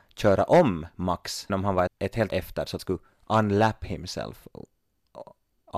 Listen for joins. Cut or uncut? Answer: cut